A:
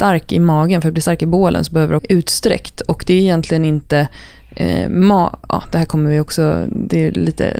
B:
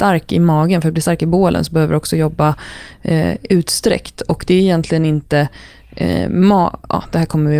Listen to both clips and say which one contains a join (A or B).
A